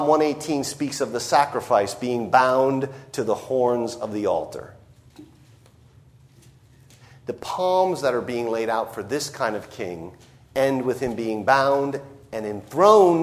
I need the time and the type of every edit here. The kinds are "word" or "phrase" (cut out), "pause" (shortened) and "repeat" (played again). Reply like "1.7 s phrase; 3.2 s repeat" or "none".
none